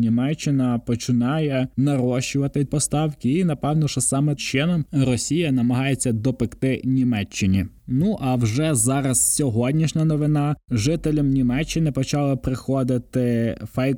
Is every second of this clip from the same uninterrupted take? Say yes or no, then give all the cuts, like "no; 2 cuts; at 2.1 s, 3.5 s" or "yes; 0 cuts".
no; 2 cuts; at 2.7 s, 4.4 s